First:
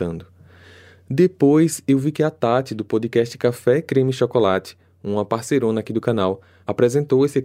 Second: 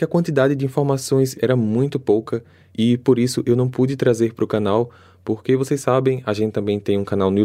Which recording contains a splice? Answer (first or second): second